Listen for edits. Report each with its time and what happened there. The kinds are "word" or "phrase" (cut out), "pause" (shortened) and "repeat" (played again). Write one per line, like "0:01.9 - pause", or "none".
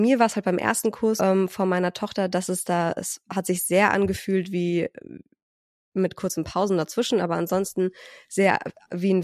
0:01.2 - word